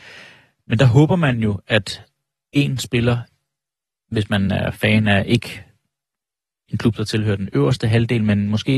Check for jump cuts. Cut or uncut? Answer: uncut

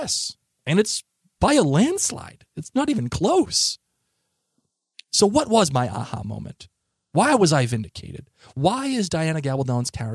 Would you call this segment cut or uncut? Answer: uncut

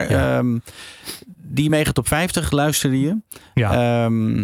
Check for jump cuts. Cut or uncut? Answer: uncut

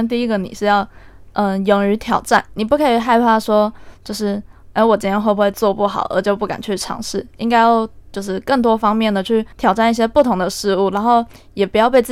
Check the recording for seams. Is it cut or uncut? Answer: cut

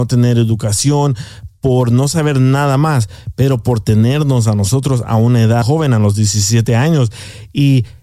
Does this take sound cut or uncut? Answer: cut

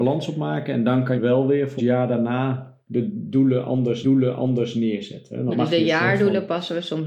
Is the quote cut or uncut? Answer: cut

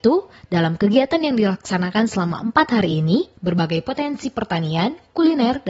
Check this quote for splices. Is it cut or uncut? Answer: uncut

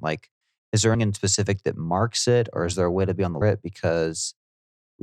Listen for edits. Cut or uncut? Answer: cut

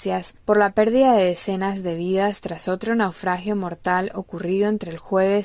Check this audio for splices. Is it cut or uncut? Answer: uncut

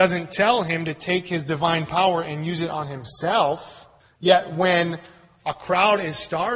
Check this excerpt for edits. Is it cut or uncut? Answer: cut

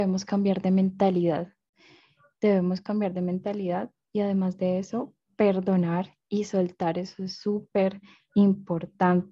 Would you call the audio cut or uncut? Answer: uncut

